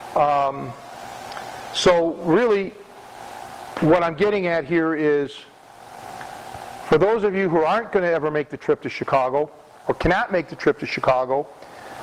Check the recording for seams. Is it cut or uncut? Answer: uncut